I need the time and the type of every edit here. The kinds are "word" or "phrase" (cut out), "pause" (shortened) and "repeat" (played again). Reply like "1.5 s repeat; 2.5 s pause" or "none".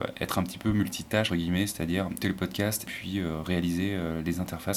1.3 s word; 2.2 s word; 2.9 s word